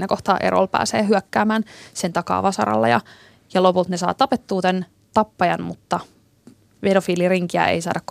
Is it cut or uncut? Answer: uncut